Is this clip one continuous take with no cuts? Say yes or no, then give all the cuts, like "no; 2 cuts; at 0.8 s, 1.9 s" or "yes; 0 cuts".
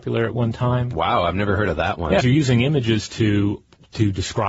no; 1 cut; at 2.2 s